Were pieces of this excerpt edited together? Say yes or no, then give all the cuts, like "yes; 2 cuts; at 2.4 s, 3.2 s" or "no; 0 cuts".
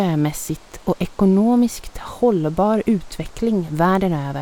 no; 0 cuts